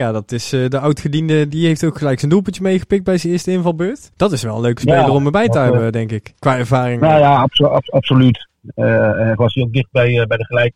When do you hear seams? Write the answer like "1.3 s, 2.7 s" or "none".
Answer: 1.5 s, 4.1 s, 6.4 s, 9.4 s

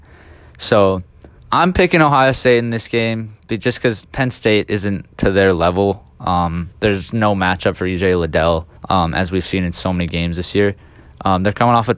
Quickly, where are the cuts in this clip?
1.4 s, 6.7 s, 8.8 s

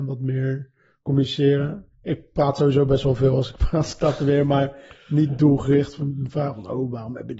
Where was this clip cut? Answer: 1.9 s

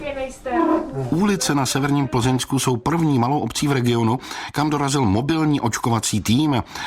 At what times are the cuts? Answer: none

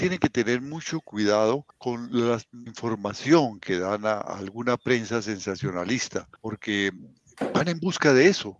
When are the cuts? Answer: 1.7 s, 2.7 s, 6.4 s

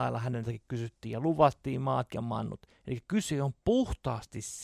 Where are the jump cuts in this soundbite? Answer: none

